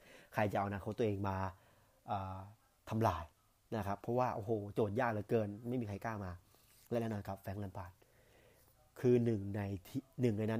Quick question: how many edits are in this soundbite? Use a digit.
0